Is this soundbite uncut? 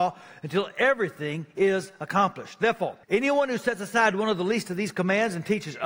no; 1 cut; at 3.0 s

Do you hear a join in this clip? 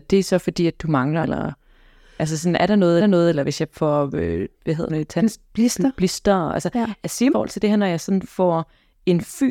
yes; 5 cuts; at 1.2 s, 3.0 s, 4.5 s, 4.9 s, 7.3 s

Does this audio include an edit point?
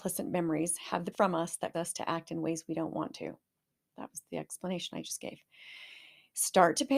yes; 2 cuts; at 1.1 s, 1.7 s

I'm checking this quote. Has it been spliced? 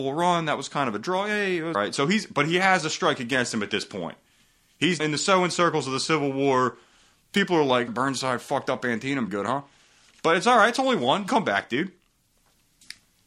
yes; 5 cuts; at 1.7 s, 5.0 s, 7.9 s, 9.3 s, 11.3 s

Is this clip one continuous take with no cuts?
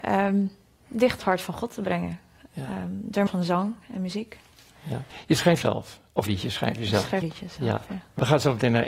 no; 5 cuts; at 1.2 s, 3.3 s, 5.6 s, 6.3 s, 7.2 s

